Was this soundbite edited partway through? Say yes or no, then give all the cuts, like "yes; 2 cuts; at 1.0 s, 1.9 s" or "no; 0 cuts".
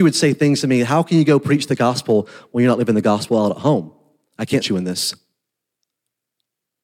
yes; 1 cut; at 4.6 s